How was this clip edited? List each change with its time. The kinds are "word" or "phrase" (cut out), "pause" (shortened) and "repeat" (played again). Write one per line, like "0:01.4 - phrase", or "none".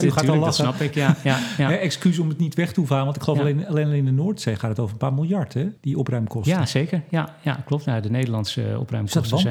0:05.8 - pause

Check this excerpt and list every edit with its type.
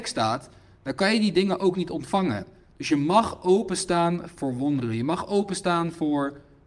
none

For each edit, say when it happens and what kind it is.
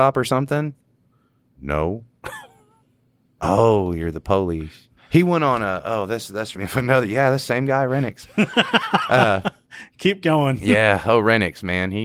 0:05.0 - pause
0:06.5 - word

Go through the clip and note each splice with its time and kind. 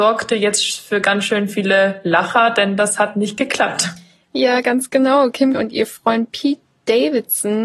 0:05.5 - word

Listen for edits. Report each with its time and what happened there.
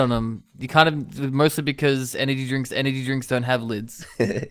0:02.7 - repeat

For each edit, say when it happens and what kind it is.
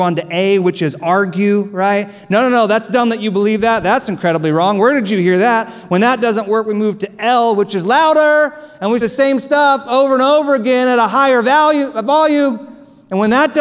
0:09.0 - word

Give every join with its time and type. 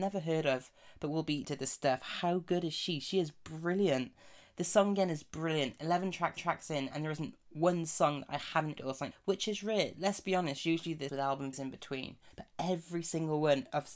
0:01.4 - word
0:06.4 - repeat
0:07.4 - pause
0:08.8 - word
0:09.1 - word
0:11.1 - word
0:11.5 - word
0:12.3 - pause

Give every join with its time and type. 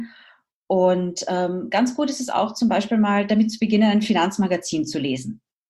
none

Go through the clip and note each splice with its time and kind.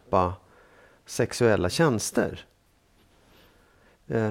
none

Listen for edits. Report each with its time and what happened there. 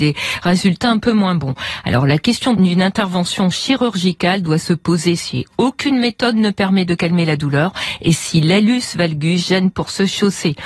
none

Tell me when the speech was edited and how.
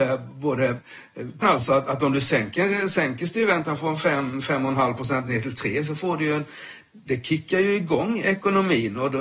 0:01.4 - phrase

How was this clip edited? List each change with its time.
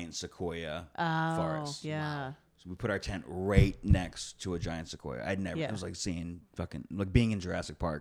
none

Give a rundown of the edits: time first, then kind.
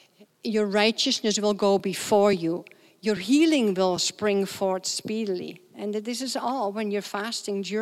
none

